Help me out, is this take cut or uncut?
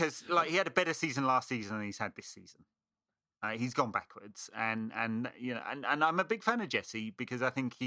uncut